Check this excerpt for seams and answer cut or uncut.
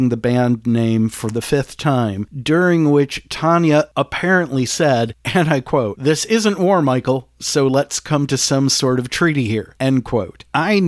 uncut